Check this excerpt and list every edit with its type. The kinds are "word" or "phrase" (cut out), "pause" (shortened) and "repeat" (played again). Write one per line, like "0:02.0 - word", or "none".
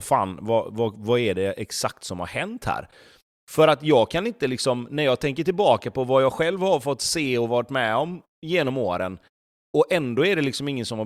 none